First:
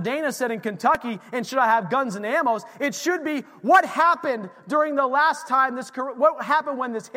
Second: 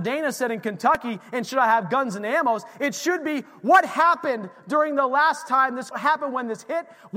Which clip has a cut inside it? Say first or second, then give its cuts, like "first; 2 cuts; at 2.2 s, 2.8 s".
second; 1 cut; at 5.9 s